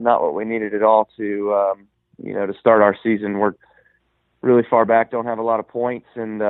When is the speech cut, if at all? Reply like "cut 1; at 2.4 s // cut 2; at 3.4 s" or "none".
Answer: none